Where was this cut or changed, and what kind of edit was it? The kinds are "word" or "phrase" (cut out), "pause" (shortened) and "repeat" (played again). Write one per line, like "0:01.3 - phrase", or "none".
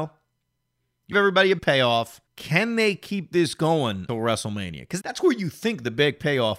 0:01.1 - phrase
0:01.6 - word
0:02.3 - pause
0:04.1 - word
0:05.0 - word